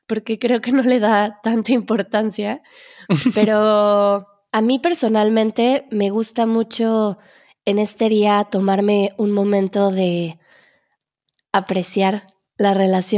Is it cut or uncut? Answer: uncut